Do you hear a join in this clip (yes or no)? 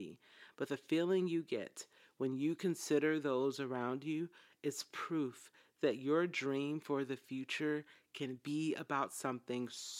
no